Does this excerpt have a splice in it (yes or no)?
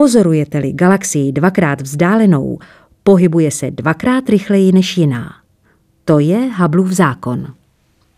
no